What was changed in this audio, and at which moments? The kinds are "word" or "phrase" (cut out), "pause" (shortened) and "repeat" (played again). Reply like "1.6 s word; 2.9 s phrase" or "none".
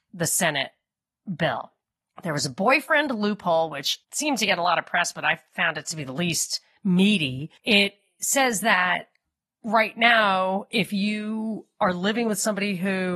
2.0 s pause; 4.0 s pause; 7.6 s pause